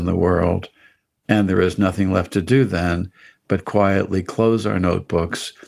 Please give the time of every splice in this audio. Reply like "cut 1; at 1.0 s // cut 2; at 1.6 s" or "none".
none